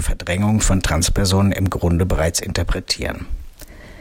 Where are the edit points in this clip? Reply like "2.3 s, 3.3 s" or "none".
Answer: none